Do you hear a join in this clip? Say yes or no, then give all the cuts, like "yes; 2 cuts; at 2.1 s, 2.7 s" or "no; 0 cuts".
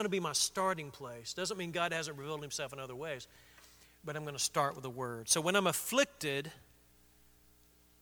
no; 0 cuts